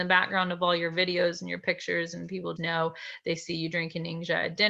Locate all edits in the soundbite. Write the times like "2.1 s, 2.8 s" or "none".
2.6 s